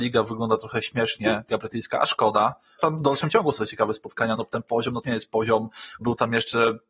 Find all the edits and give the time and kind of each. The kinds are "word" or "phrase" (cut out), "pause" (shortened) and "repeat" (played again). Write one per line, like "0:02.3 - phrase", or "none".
0:01.5 - word
0:02.8 - word
0:03.6 - word
0:04.3 - word
0:05.0 - word
0:06.0 - word